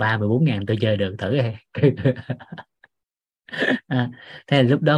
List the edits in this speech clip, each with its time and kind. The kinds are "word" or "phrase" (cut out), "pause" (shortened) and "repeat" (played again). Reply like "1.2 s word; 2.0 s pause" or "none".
none